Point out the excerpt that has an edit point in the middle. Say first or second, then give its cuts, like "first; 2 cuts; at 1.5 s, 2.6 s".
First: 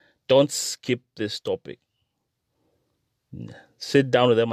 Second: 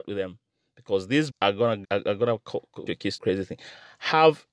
second; 4 cuts; at 1.3 s, 1.8 s, 2.9 s, 3.2 s